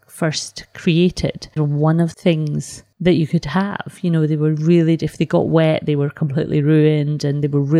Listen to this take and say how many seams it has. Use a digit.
2